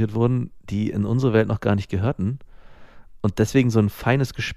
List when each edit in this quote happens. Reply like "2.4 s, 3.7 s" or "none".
none